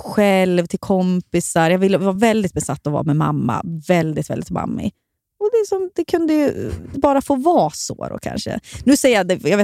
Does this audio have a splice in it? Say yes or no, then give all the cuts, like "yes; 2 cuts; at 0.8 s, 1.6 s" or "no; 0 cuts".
no; 0 cuts